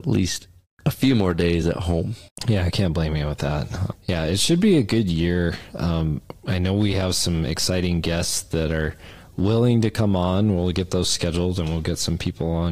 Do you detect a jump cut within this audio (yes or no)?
no